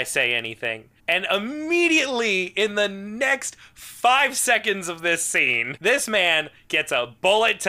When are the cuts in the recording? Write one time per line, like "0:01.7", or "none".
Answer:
0:01.0